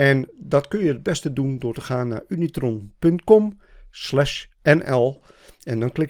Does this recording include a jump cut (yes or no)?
yes